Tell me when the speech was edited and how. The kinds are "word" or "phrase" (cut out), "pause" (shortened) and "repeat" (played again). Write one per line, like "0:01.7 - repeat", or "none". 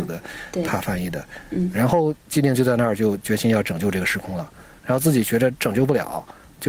0:01.7 - word